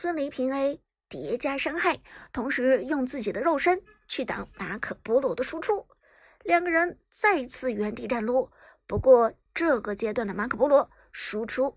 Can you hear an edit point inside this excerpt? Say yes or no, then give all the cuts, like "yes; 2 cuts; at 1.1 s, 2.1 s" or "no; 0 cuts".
no; 0 cuts